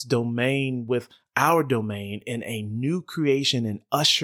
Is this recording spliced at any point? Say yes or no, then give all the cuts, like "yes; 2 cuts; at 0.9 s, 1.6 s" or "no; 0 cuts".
no; 0 cuts